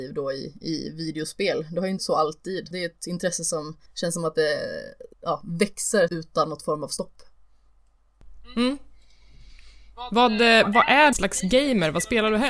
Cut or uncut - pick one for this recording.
cut